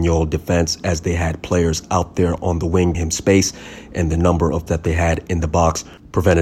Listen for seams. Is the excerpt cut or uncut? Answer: cut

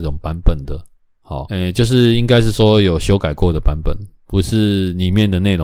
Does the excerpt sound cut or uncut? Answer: cut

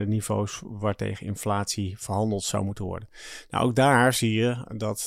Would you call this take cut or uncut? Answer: uncut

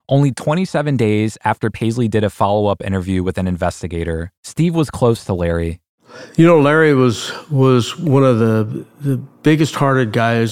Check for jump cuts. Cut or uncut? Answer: cut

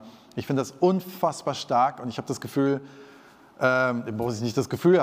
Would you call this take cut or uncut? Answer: uncut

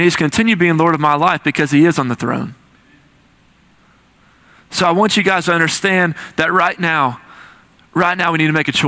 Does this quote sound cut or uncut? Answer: uncut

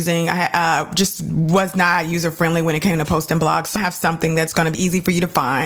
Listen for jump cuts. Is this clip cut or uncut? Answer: cut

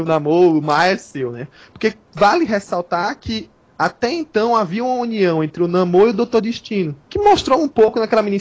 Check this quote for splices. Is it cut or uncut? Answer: uncut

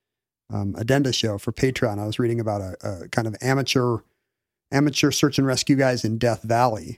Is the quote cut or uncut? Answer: uncut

